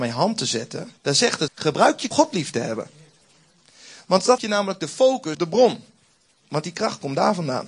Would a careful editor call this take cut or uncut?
cut